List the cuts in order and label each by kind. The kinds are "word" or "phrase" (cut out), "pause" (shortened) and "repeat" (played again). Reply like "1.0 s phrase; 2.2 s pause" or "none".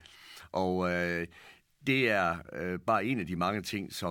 none